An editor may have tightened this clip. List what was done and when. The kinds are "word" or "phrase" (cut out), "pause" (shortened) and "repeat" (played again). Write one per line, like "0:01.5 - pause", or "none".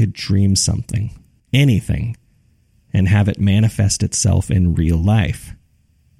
none